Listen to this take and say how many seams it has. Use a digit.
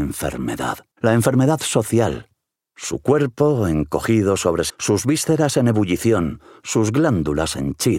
3